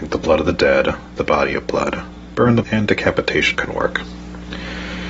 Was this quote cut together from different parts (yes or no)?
yes